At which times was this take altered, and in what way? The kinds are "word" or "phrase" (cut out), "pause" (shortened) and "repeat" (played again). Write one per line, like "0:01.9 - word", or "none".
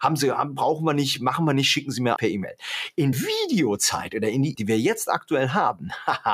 0:02.2 - word
0:03.1 - word
0:04.5 - word